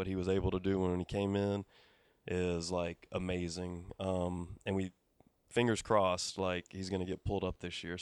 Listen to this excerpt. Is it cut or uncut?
uncut